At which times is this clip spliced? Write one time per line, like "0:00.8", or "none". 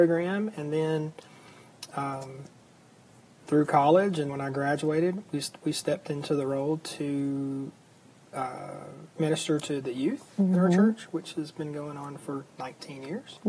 0:04.3